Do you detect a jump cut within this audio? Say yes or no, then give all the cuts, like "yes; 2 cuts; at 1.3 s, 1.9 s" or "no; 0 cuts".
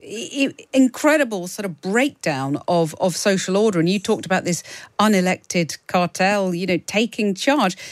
no; 0 cuts